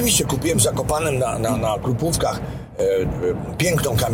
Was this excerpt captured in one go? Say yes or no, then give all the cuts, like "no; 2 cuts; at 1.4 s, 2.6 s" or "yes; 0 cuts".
yes; 0 cuts